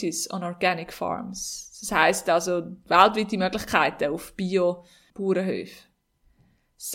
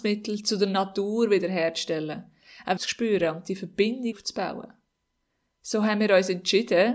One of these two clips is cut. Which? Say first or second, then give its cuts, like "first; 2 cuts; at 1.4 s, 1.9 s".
second; 2 cuts; at 2.8 s, 4.1 s